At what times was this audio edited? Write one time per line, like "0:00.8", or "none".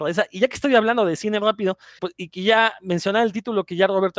0:02.0